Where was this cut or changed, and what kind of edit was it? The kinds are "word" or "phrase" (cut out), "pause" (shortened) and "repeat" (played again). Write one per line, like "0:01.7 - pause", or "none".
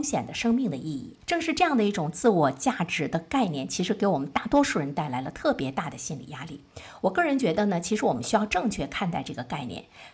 0:01.2 - pause